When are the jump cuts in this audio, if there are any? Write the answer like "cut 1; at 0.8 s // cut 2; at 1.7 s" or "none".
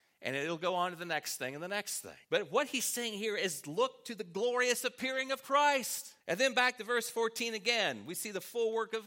cut 1; at 2.2 s // cut 2; at 6.2 s